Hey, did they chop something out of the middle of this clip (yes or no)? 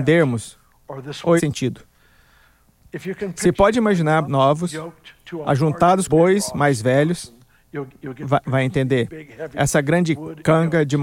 yes